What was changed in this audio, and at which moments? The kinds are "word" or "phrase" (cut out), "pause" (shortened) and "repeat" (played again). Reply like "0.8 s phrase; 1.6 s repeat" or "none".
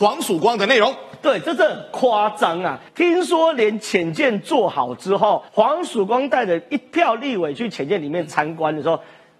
2.9 s pause; 5.5 s pause